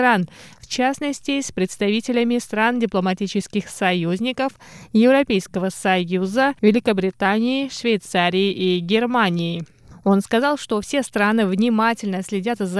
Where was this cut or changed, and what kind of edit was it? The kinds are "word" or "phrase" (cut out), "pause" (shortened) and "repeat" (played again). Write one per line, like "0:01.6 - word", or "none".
0:06.6 - pause